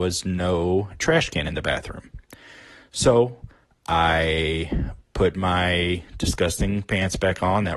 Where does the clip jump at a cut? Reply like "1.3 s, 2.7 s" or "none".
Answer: none